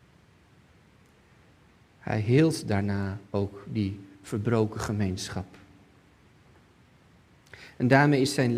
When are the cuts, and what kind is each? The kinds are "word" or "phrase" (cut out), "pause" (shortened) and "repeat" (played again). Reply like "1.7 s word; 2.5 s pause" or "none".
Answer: 3.2 s pause; 4.1 s pause